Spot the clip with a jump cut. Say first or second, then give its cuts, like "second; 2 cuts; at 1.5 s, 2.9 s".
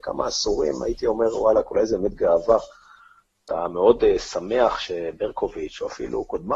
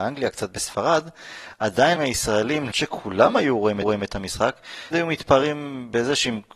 second; 4 cuts; at 2.0 s, 2.7 s, 3.8 s, 4.9 s